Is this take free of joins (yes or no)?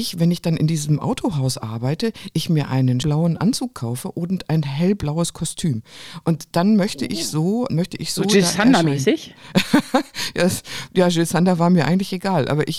no